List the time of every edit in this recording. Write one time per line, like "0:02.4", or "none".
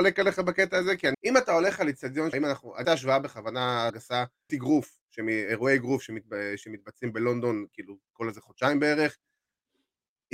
0:01.1
0:02.3
0:02.8
0:03.9
0:04.5